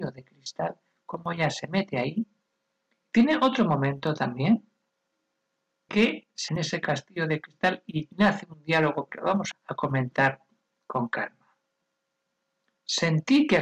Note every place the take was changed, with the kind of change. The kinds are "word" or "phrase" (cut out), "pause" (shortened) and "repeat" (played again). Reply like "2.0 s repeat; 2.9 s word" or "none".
5.9 s word; 6.5 s word; 9.1 s word; 9.5 s word